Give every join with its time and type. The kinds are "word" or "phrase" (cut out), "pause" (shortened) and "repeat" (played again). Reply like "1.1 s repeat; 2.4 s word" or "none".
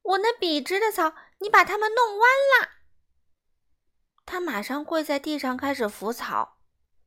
none